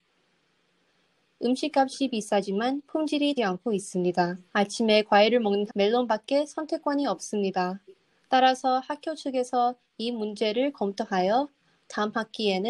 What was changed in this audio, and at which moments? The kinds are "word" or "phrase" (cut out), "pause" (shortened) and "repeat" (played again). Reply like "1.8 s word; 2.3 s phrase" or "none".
3.4 s word; 4.5 s pause; 5.7 s word; 8.0 s pause